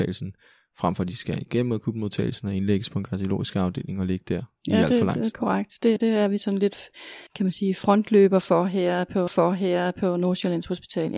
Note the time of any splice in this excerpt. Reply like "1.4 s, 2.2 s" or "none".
5.3 s, 6.0 s, 7.3 s, 9.3 s